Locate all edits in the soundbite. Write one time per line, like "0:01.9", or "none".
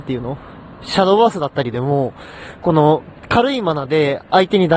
0:03.2